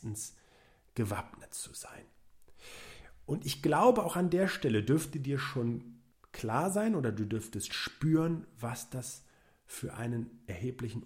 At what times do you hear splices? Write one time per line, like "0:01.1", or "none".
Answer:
0:06.1

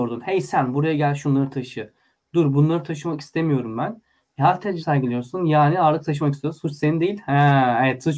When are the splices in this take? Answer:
0:04.8

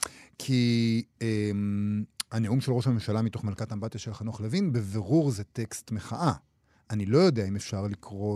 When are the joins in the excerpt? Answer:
none

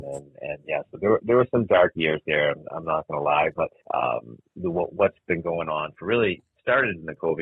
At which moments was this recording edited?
0:03.8

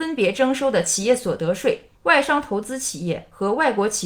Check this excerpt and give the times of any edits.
0:01.9

